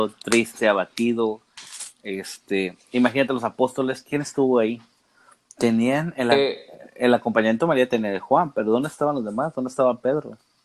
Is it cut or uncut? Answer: cut